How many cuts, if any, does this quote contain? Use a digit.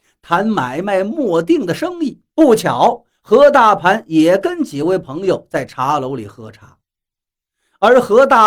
1